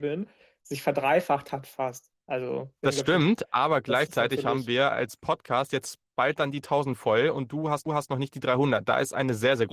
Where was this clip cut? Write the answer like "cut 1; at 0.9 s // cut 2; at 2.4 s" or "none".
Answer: cut 1; at 2.8 s // cut 2; at 7.9 s